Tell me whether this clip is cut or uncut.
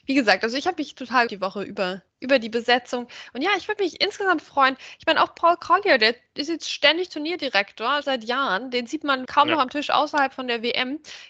cut